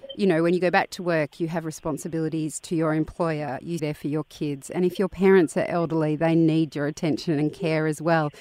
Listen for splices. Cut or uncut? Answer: cut